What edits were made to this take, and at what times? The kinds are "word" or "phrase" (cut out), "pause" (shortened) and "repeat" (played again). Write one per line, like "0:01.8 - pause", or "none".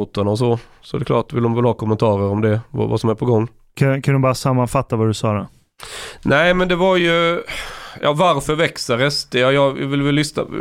none